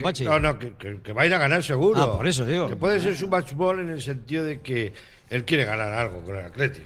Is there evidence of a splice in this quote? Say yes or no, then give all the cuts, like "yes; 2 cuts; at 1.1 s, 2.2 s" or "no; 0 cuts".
no; 0 cuts